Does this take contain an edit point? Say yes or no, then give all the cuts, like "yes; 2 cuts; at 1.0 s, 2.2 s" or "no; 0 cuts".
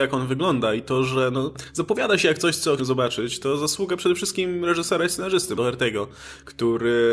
yes; 2 cuts; at 2.8 s, 5.6 s